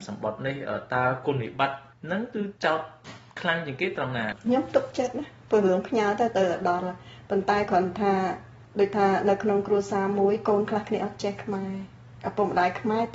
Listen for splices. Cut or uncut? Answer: cut